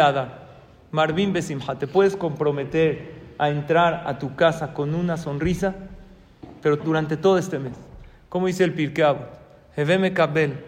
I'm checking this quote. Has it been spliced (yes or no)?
yes